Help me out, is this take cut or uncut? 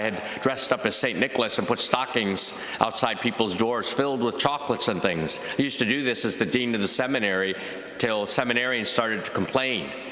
uncut